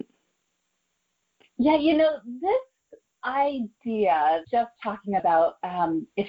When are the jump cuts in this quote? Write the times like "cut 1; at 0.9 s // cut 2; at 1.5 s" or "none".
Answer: cut 1; at 4.4 s // cut 2; at 5.2 s